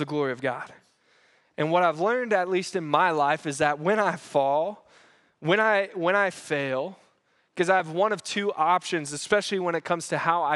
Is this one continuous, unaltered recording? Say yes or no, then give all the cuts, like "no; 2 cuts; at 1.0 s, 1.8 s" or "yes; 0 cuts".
yes; 0 cuts